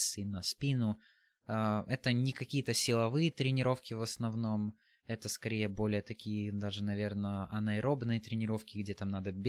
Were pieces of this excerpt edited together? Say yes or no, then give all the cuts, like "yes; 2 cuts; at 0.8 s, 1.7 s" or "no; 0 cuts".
no; 0 cuts